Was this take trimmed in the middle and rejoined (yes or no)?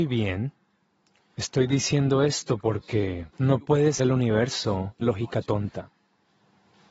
yes